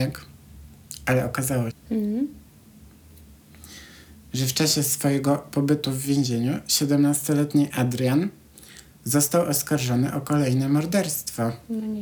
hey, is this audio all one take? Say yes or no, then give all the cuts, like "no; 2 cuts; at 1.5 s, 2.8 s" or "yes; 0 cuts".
no; 1 cut; at 1.7 s